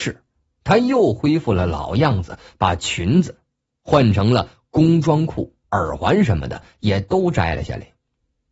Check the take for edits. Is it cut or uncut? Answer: cut